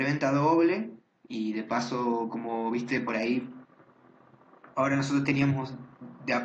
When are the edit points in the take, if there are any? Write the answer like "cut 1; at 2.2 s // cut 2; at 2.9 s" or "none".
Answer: none